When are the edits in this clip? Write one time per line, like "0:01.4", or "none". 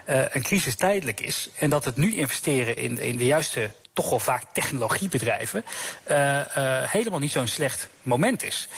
0:02.8
0:03.8